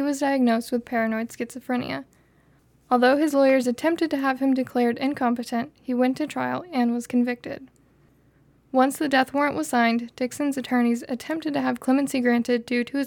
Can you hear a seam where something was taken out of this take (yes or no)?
no